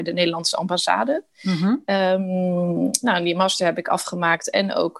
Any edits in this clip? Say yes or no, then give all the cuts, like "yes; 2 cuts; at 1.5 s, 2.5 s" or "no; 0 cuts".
no; 0 cuts